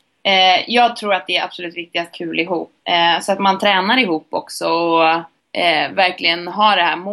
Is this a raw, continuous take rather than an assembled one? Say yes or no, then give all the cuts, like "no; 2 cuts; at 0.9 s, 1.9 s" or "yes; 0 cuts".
no; 2 cuts; at 2.1 s, 2.8 s